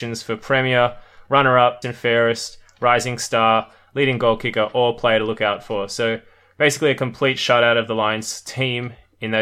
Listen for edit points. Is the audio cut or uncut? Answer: cut